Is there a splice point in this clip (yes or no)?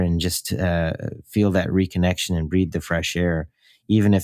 no